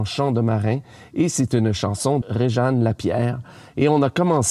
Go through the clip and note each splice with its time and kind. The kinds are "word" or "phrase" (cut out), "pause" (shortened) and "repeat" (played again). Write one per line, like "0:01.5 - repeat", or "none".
0:02.2 - word